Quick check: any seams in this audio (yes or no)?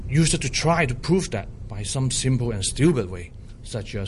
no